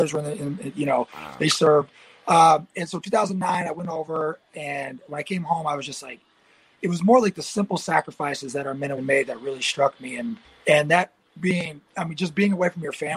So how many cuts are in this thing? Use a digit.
3